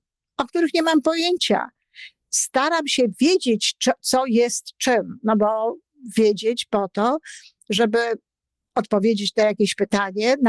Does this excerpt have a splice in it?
no; 0 cuts

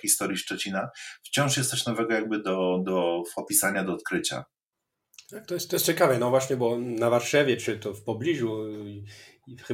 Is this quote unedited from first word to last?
yes; 0 cuts

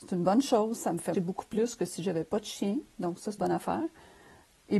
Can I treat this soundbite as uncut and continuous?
no; 2 cuts; at 1.1 s, 3.4 s

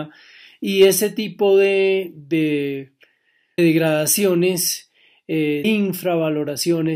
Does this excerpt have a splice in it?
yes; 2 cuts; at 3.6 s, 5.6 s

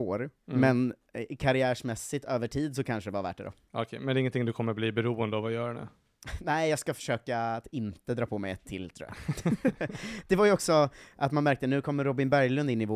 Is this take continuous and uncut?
yes; 0 cuts

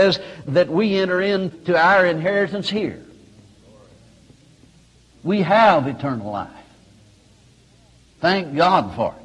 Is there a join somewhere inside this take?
no; 0 cuts

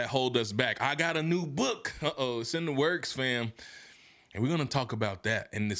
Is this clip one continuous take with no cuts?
yes; 0 cuts

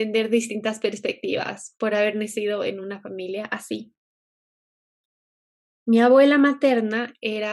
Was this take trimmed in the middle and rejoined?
no; 0 cuts

